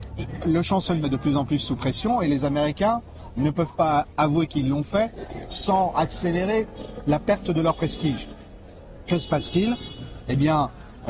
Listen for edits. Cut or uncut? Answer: cut